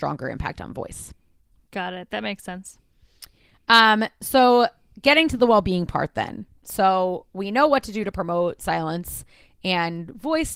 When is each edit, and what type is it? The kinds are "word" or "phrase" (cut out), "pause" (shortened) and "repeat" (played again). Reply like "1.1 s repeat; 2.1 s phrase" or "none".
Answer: none